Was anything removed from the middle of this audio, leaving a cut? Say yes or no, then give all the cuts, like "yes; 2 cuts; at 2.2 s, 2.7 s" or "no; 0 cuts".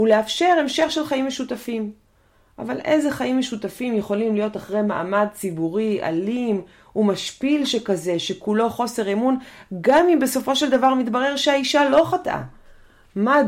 no; 0 cuts